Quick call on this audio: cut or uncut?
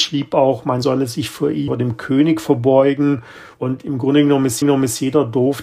cut